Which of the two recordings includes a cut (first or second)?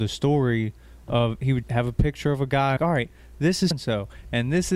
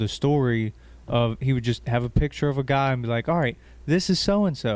first